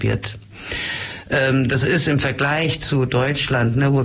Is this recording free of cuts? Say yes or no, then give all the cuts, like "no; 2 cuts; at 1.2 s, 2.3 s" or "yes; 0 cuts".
yes; 0 cuts